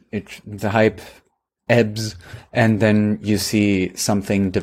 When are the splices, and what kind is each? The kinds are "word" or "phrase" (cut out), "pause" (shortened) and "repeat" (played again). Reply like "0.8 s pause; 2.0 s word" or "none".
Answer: none